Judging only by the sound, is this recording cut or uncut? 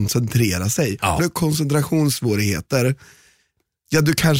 cut